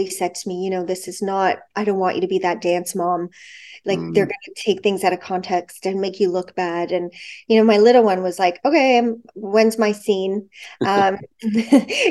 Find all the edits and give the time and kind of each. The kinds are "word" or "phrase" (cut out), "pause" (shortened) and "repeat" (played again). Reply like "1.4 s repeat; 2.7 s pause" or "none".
none